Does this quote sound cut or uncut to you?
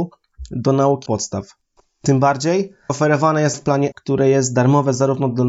cut